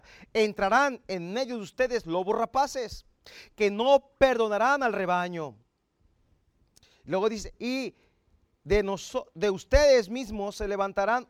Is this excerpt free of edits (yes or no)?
yes